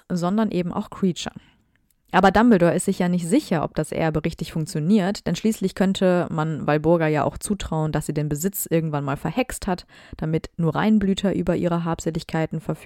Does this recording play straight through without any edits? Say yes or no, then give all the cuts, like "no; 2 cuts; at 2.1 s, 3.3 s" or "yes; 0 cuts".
yes; 0 cuts